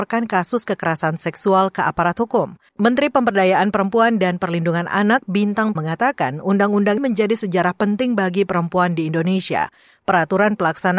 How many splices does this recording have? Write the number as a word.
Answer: three